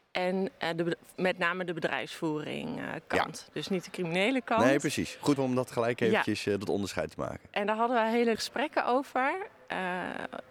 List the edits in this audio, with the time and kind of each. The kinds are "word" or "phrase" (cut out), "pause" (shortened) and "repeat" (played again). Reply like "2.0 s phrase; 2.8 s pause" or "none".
5.4 s word; 8.4 s word